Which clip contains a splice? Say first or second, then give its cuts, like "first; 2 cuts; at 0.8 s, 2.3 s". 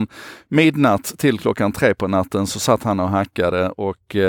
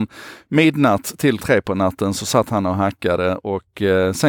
second; 1 cut; at 1.4 s